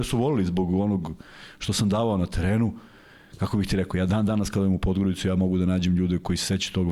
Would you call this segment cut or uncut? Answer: uncut